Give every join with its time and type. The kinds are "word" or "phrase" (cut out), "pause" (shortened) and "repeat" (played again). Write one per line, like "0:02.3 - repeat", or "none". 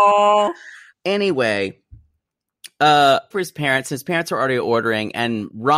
0:00.9 - word
0:03.3 - phrase